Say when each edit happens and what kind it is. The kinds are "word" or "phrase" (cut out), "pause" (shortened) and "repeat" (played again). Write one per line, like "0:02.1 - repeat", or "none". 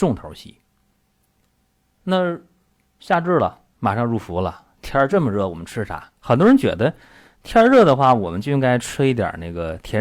0:03.7 - pause
0:06.2 - pause